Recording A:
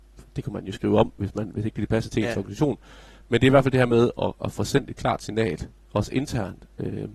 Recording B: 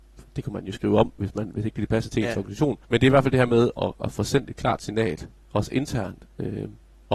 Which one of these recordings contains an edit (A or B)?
B